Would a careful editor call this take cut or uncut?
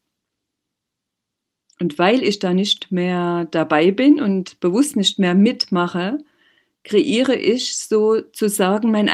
uncut